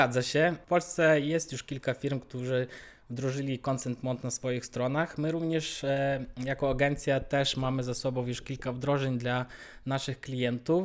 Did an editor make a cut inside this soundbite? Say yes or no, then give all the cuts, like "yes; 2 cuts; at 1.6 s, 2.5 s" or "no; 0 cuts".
no; 0 cuts